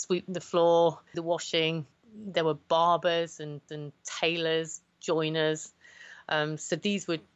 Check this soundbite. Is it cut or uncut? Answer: cut